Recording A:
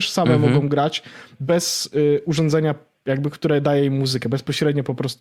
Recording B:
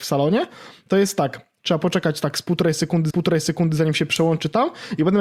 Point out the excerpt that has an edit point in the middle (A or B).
B